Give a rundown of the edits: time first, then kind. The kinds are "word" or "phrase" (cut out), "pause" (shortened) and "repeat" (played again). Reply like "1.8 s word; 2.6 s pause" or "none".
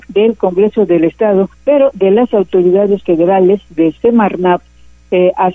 1.5 s pause